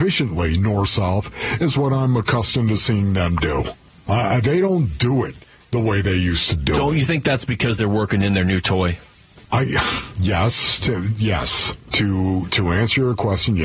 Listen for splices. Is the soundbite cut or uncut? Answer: uncut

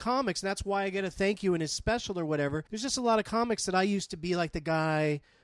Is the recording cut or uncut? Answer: cut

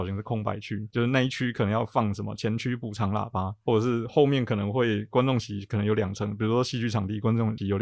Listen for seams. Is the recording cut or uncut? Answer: cut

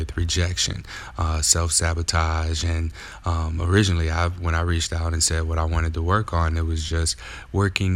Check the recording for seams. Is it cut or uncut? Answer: uncut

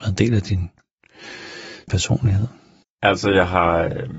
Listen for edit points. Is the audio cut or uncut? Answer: cut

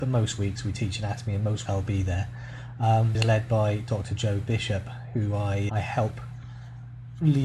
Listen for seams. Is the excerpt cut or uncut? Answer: cut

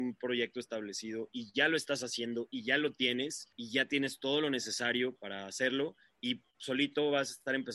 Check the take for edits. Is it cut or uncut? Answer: cut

